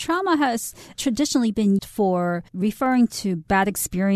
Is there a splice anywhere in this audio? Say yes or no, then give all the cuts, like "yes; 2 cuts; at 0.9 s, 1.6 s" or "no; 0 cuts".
yes; 2 cuts; at 1.8 s, 2.5 s